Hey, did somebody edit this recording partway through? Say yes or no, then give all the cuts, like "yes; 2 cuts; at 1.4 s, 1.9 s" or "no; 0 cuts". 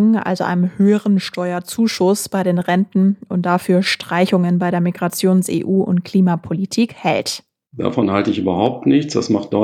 no; 0 cuts